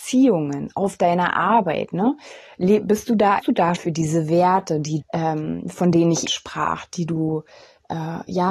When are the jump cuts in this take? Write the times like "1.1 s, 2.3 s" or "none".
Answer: 3.4 s, 3.8 s, 5.0 s, 6.3 s